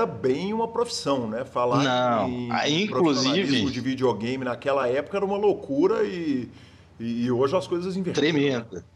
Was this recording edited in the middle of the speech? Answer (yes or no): no